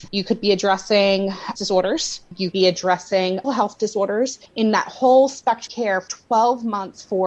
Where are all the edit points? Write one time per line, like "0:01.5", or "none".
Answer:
0:01.6
0:02.5
0:03.4
0:04.5
0:05.7
0:06.1

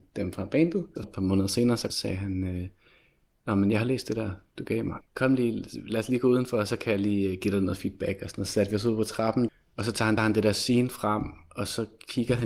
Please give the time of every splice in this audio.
0:01.0
0:05.1
0:10.2

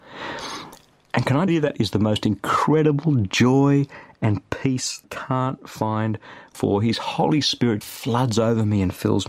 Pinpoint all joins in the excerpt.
0:01.5
0:05.0
0:06.5
0:07.8

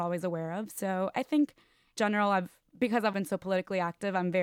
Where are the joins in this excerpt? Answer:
0:01.1
0:02.0
0:03.1

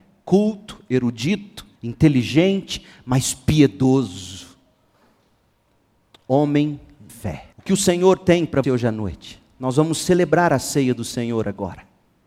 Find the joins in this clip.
0:01.8
0:07.1
0:07.5
0:08.6

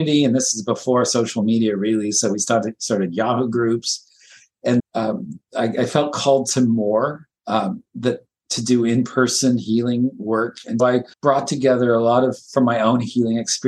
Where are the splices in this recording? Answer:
0:04.8
0:10.8
0:11.1

